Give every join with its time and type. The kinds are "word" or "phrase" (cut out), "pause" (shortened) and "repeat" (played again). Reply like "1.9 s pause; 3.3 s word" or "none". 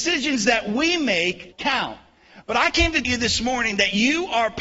1.5 s word; 3.0 s word